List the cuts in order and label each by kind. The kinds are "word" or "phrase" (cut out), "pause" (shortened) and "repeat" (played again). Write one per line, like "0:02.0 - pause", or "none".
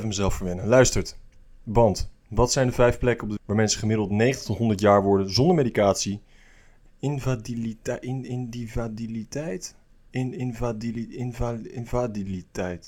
0:03.4 - word
0:06.9 - word